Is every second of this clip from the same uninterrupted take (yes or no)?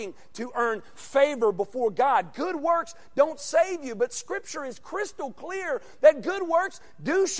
yes